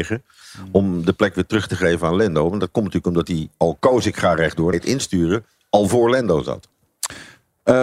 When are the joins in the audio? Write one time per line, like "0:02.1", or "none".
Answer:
0:04.7